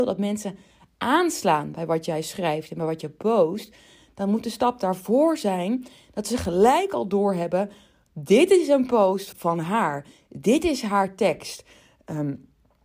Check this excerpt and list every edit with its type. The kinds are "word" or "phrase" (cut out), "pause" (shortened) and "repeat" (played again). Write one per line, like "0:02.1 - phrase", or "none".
0:09.3 - word